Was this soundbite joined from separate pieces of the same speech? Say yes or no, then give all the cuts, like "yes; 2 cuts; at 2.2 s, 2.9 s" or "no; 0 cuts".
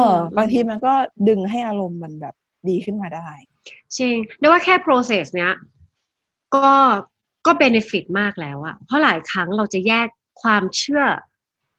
no; 0 cuts